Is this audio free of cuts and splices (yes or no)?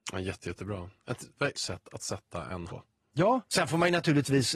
no